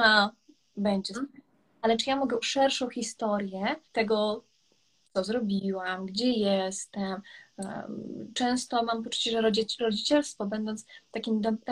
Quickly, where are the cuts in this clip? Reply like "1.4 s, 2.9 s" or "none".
1.1 s, 2.4 s, 3.8 s